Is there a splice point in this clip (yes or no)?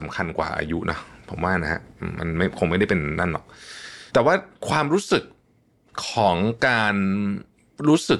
yes